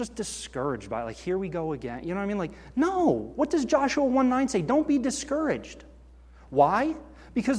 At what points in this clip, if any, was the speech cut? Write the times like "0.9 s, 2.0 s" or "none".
none